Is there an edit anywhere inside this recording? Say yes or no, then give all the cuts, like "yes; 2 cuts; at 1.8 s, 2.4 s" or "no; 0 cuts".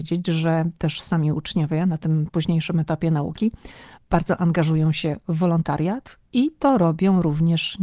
no; 0 cuts